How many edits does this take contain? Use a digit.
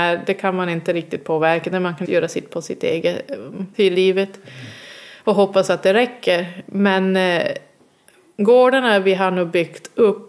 4